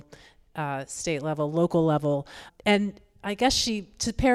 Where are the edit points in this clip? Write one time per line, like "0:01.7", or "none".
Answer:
0:02.5